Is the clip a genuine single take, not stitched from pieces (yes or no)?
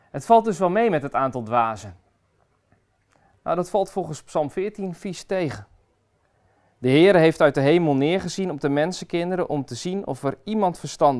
yes